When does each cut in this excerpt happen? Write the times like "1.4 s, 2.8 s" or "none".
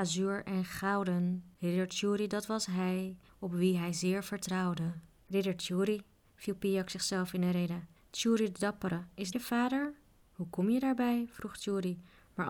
9.3 s